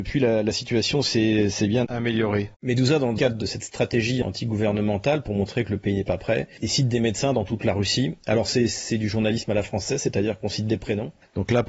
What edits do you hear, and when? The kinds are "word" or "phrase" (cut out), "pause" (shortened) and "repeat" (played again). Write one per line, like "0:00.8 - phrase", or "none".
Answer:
0:02.5 - pause